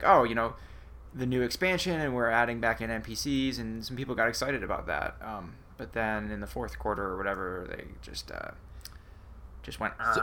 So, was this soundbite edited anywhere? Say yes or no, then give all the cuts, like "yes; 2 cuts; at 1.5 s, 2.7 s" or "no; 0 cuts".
no; 0 cuts